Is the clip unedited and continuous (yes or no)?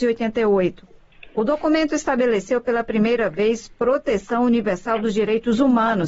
yes